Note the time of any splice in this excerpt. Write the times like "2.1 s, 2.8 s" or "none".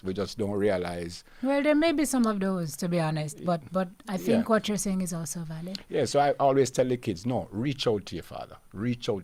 none